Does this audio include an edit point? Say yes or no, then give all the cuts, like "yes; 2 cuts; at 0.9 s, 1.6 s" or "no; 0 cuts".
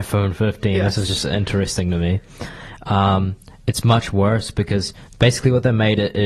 no; 0 cuts